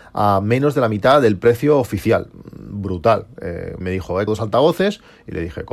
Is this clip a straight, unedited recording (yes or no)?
no